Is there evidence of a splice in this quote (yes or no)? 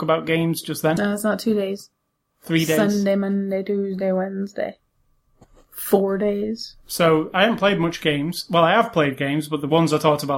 no